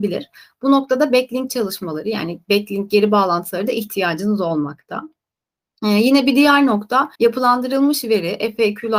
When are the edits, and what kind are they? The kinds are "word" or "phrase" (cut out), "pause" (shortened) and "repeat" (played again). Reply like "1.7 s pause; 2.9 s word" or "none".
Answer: 7.1 s pause